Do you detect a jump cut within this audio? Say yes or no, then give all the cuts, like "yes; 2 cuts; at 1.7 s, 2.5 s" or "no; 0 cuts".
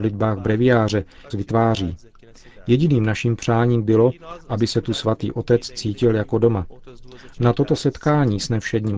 yes; 1 cut; at 1.3 s